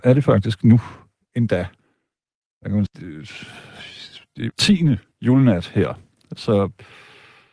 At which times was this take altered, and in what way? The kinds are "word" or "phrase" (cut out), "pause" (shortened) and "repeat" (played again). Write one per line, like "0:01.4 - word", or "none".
0:02.9 - word
0:04.5 - word